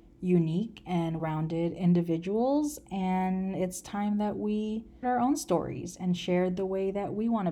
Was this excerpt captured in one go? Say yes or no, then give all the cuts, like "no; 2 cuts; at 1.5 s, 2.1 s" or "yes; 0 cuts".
no; 2 cuts; at 1.2 s, 5.0 s